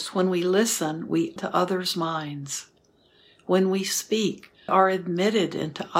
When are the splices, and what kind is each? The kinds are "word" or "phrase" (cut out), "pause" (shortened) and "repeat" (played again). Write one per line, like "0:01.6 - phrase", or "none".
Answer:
0:01.4 - word
0:04.7 - word